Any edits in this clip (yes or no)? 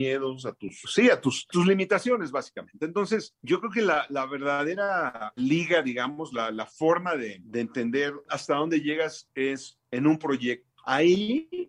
no